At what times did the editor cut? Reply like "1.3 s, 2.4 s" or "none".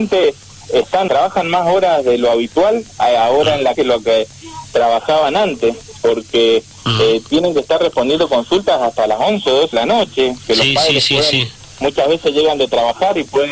1.1 s, 3.7 s, 9.7 s